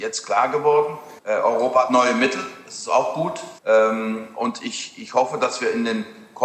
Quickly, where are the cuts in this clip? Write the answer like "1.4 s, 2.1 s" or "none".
1.2 s, 1.9 s, 3.6 s